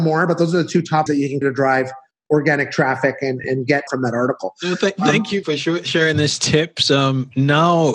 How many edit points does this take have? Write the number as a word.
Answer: six